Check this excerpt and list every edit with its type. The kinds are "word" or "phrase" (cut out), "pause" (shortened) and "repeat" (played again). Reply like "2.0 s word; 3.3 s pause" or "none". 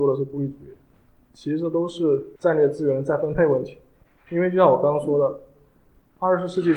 2.4 s pause